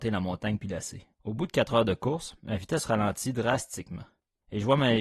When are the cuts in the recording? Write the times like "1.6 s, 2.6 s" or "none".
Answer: 1.1 s